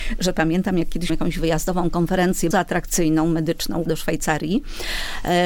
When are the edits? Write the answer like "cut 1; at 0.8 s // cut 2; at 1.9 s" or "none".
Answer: cut 1; at 1.1 s // cut 2; at 2.5 s // cut 3; at 3.9 s